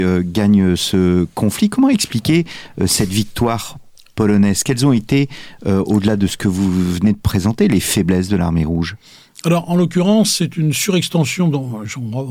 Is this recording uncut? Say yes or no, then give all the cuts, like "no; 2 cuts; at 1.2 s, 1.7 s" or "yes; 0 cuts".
yes; 0 cuts